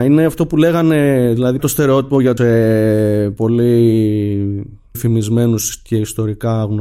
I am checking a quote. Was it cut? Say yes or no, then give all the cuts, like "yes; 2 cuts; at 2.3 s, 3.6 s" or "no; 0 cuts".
yes; 3 cuts; at 1.6 s, 2.4 s, 4.9 s